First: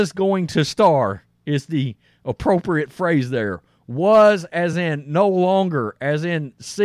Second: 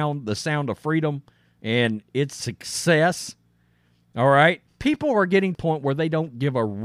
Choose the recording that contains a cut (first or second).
second